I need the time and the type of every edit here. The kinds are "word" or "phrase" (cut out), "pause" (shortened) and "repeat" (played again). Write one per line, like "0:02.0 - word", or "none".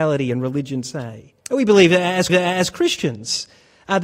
0:01.4 - pause
0:02.3 - repeat